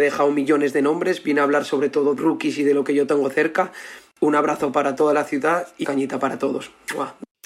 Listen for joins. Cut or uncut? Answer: cut